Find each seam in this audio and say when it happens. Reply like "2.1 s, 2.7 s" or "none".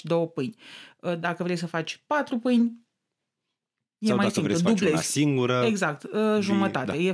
none